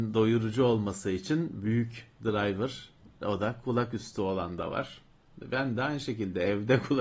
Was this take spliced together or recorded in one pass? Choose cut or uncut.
uncut